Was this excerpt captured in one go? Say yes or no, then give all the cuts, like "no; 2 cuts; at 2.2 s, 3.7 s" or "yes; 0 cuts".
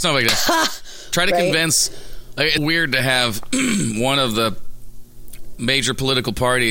no; 1 cut; at 2.6 s